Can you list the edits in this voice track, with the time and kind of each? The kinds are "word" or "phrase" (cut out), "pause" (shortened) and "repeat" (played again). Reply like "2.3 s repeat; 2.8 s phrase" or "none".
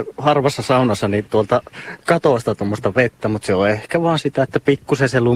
1.3 s word

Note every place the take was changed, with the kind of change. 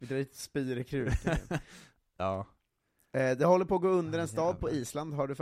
none

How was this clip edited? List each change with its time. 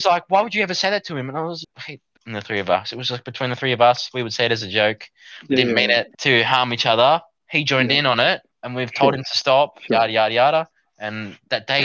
1.6 s word; 2.2 s phrase; 6.1 s pause; 8.5 s pause

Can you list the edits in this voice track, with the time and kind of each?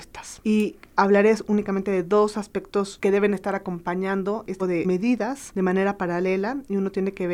4.6 s word

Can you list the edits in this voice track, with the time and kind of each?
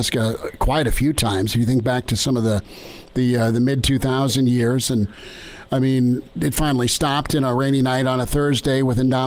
6.4 s word

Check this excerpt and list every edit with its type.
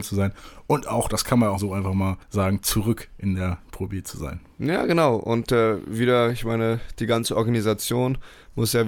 1.6 s word; 2.2 s pause

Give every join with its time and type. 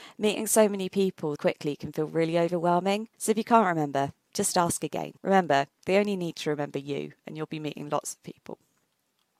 1.4 s word; 3.1 s pause; 5.2 s pause

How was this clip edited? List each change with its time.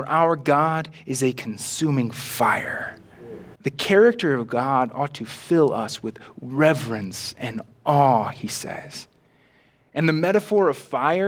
3.6 s pause

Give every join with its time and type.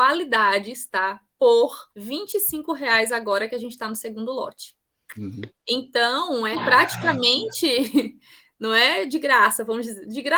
1.9 s pause; 6.5 s word

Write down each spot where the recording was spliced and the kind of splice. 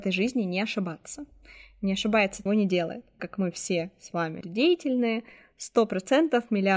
2.5 s phrase; 3.2 s word; 4.4 s word

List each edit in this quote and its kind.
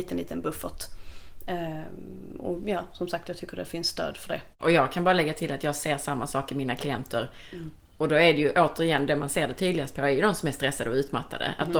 4.5 s pause

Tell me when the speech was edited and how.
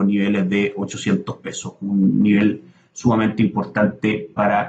none

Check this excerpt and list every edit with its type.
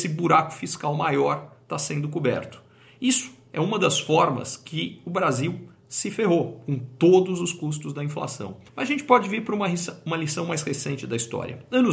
8.7 s pause

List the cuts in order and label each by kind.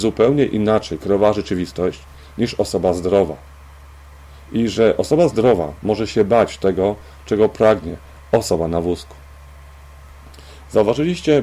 none

